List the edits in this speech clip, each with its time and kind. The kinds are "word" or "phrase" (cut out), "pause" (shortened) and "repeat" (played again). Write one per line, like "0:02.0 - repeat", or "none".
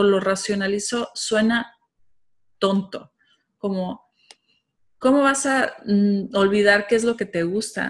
none

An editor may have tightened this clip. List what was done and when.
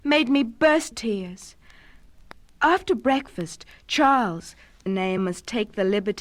0:00.9 - word
0:02.4 - pause
0:04.9 - phrase
0:05.2 - word

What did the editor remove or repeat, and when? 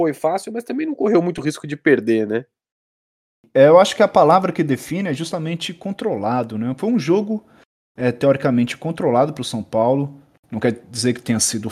none

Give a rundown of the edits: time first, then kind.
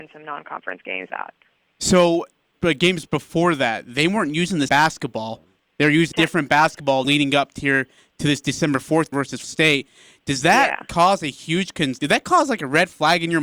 0:01.1 - word
0:02.5 - word
0:04.7 - word
0:06.1 - word
0:07.0 - word
0:09.1 - word
0:09.4 - word
0:12.0 - word

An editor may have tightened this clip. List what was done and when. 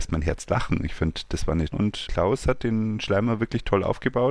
0:01.7 - word
0:02.1 - word

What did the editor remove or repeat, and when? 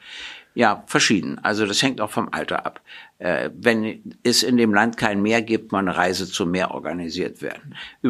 0:05.7 - word

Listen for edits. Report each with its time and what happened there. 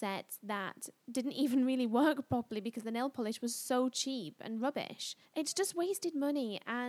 0:01.0 - pause
0:05.3 - pause

